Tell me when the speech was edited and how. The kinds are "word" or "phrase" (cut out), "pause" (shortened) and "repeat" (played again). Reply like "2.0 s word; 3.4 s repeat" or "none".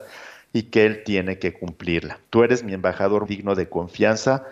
2.2 s pause; 3.3 s word